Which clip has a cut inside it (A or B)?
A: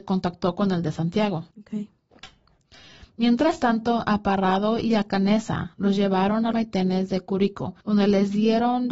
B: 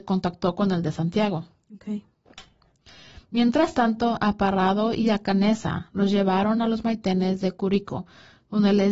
A